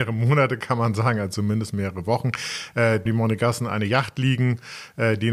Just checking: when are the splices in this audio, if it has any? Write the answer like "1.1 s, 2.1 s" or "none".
3.1 s